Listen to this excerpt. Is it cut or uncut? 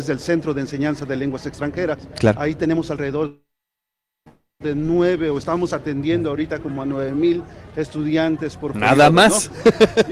uncut